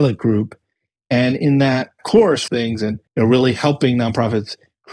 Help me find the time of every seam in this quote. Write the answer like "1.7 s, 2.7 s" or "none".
2.5 s, 3.1 s